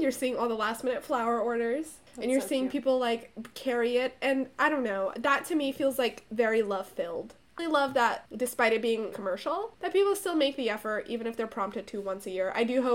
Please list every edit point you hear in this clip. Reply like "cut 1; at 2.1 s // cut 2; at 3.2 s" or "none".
cut 1; at 7.6 s // cut 2; at 9.1 s